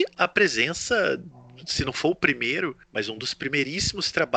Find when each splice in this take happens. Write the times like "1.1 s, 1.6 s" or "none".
2.8 s